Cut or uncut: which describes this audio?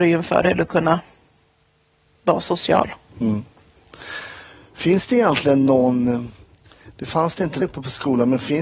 cut